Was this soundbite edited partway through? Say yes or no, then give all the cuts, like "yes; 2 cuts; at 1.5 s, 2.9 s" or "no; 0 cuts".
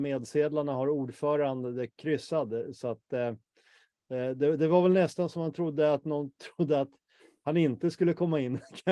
no; 0 cuts